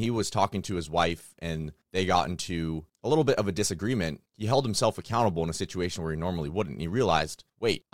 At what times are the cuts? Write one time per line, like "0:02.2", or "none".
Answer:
none